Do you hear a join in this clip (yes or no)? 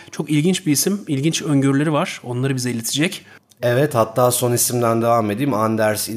no